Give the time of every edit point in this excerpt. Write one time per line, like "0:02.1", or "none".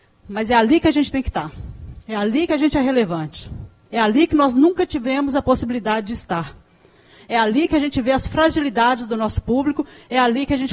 none